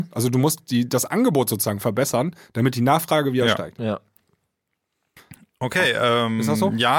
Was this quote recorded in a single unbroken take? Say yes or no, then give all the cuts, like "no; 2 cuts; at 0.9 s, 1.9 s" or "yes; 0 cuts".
yes; 0 cuts